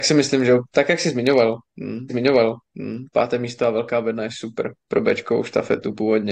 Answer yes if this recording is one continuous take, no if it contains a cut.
no